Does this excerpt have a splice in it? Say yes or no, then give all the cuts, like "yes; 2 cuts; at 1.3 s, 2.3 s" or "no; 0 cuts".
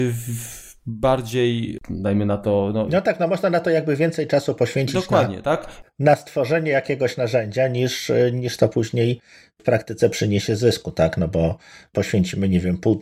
no; 0 cuts